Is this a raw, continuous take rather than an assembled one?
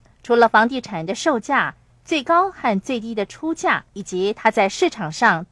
no; 1 cut; at 3.9 s

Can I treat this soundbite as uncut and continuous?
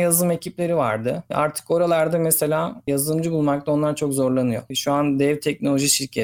yes; 0 cuts

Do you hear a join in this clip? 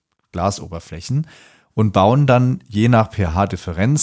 no; 0 cuts

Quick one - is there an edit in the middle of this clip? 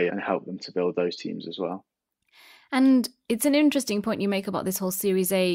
no; 0 cuts

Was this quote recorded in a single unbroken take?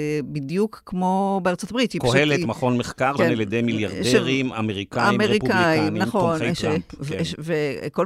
no; 1 cut; at 3.2 s

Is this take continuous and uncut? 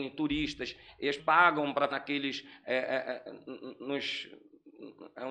no; 2 cuts; at 1.2 s, 1.9 s

